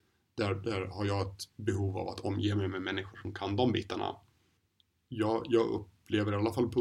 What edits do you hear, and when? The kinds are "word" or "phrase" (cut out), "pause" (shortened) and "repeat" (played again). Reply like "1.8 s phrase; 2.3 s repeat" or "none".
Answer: none